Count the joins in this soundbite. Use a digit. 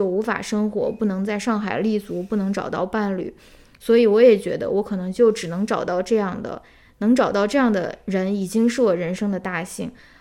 0